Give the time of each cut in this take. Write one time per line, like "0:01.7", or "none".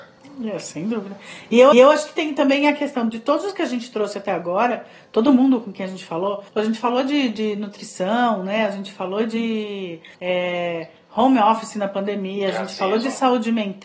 0:01.7
0:06.5
0:10.1